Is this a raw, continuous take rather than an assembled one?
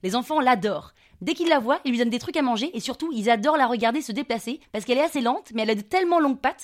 yes; 0 cuts

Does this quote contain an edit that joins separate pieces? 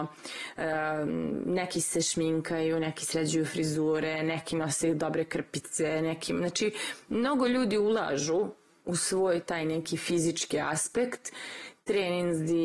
no; 0 cuts

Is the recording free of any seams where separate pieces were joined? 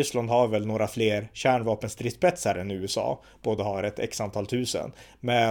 yes; 0 cuts

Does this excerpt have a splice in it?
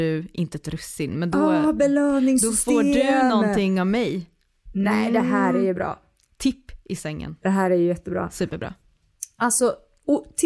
no; 0 cuts

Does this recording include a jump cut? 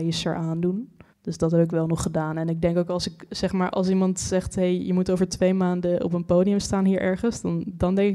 yes; 1 cut; at 1.1 s

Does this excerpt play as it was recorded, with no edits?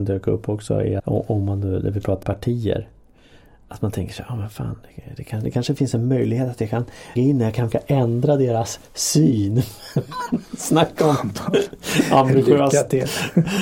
no; 4 cuts; at 1.0 s, 2.2 s, 7.2 s, 7.7 s

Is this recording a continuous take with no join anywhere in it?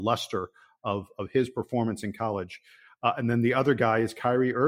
yes; 0 cuts

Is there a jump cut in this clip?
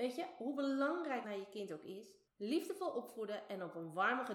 yes; 2 cuts; at 1.2 s, 2.3 s

